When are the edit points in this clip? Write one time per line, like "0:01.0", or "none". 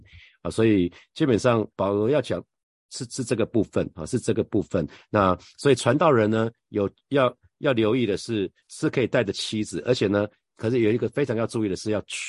0:01.7
0:08.6

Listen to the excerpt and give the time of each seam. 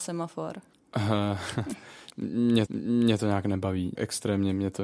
0:02.7
0:04.0

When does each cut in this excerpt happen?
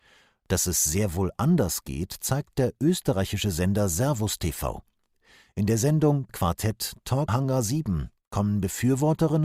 0:06.3
0:07.3

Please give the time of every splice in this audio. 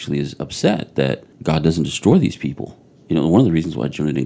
0:01.3

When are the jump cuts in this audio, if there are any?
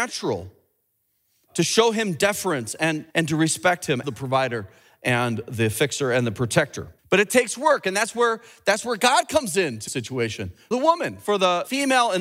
0:03.1
0:04.0
0:07.0
0:09.9
0:10.7

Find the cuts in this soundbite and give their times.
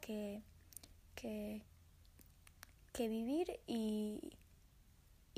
none

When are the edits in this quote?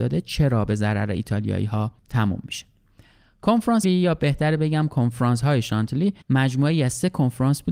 0:02.0
0:03.8
0:06.2

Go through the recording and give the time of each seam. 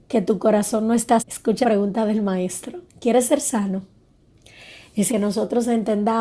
0:01.2
0:01.6
0:02.9
0:05.1

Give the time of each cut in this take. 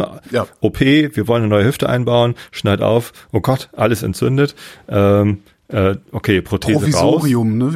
none

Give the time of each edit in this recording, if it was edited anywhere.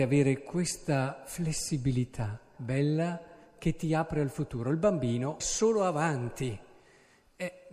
0:02.6
0:05.4

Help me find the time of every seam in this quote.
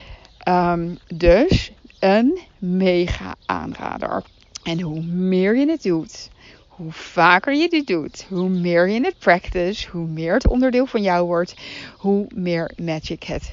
0:01.0

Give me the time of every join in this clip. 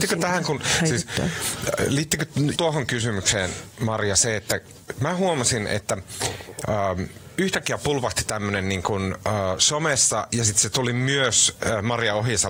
0:02.5

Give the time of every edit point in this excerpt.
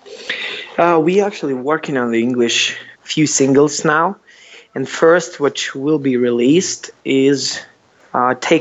0:02.9

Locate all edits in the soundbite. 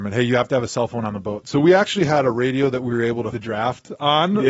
0:03.3

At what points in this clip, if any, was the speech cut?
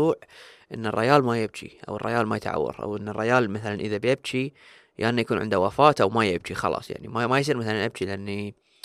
none

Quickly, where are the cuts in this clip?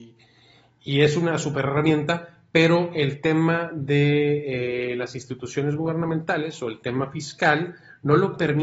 none

